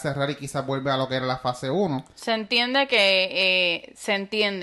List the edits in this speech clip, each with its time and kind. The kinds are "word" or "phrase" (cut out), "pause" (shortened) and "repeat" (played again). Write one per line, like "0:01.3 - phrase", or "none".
none